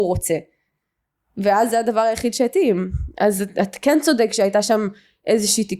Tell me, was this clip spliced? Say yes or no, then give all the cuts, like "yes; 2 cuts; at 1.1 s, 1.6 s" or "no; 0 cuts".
no; 0 cuts